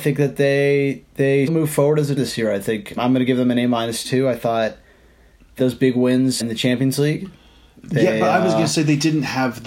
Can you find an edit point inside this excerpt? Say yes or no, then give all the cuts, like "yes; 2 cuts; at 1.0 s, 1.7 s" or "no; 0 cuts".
yes; 5 cuts; at 1.5 s, 2.2 s, 3.0 s, 5.6 s, 6.4 s